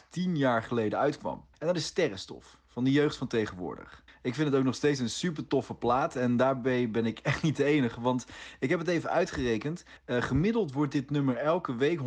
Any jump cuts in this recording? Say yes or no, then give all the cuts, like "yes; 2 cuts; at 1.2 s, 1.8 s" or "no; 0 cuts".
yes; 3 cuts; at 1.5 s, 4.1 s, 10.0 s